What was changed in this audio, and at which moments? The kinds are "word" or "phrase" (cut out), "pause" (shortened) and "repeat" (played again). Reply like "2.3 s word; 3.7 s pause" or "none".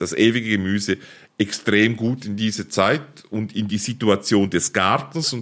none